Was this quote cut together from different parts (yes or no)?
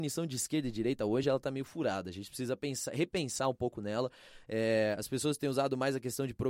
no